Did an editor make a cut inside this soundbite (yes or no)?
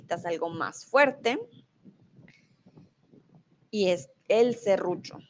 no